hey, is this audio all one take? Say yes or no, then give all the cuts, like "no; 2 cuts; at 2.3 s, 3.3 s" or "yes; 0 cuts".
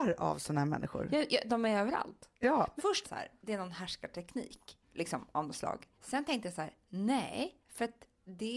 no; 4 cuts; at 3.0 s, 4.8 s, 6.0 s, 7.6 s